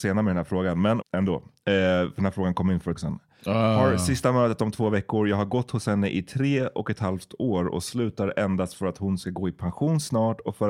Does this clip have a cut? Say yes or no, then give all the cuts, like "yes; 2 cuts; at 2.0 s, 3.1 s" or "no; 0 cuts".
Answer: yes; 2 cuts; at 1.0 s, 2.9 s